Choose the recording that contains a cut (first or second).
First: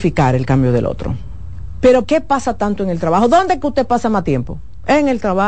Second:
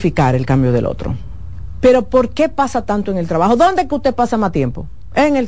first